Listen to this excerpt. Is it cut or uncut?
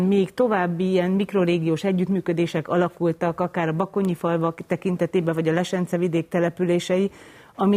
uncut